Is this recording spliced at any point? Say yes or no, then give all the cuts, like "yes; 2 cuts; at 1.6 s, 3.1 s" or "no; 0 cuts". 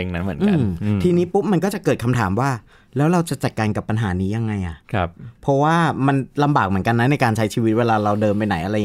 no; 0 cuts